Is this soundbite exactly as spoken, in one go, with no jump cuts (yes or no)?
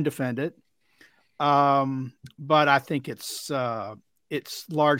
yes